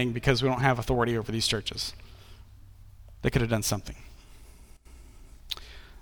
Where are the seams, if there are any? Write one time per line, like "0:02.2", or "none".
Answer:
none